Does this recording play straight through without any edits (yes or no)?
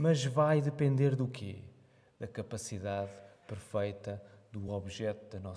yes